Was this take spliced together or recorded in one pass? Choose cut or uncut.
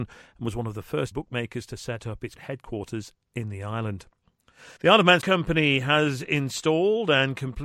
cut